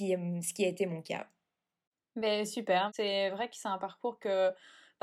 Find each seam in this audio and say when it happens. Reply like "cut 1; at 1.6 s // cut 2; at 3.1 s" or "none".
none